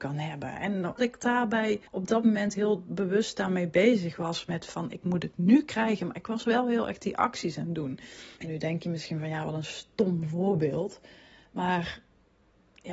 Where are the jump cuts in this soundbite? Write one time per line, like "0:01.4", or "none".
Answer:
0:01.0
0:01.9
0:08.4